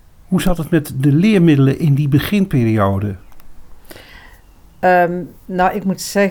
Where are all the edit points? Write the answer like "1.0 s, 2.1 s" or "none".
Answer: none